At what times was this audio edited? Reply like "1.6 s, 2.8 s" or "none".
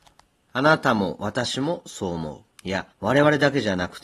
2.5 s, 2.9 s